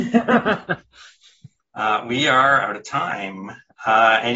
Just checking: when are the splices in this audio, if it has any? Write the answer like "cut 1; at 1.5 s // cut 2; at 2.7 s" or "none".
cut 1; at 1.6 s